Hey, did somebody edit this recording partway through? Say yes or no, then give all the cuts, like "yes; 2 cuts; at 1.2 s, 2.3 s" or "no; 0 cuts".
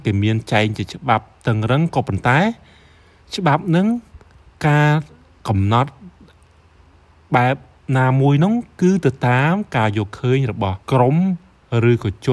yes; 1 cut; at 10.8 s